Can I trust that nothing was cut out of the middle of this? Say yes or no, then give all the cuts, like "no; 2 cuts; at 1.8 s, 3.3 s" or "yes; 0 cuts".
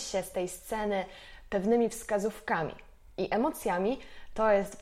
yes; 0 cuts